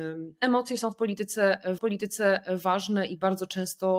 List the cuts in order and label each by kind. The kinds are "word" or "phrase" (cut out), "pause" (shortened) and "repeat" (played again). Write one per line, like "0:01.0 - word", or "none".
0:01.8 - repeat